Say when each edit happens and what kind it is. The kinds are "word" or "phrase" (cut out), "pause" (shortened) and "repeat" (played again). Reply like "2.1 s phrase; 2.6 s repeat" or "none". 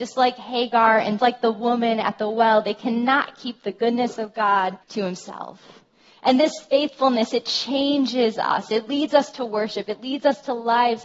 1.2 s word; 4.8 s pause; 5.9 s pause